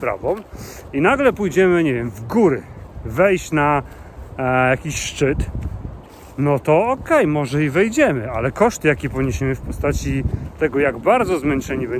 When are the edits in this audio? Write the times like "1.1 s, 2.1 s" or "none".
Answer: none